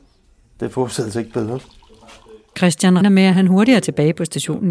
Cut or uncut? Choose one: cut